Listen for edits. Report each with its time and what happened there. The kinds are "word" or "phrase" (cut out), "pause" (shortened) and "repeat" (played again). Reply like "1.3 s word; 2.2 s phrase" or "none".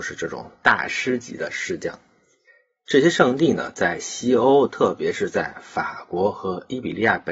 none